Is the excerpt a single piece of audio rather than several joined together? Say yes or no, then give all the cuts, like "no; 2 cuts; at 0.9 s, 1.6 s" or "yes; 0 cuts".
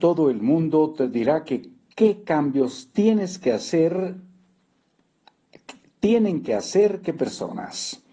yes; 0 cuts